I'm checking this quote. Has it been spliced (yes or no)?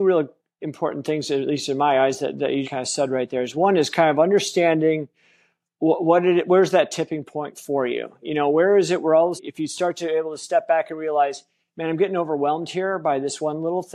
yes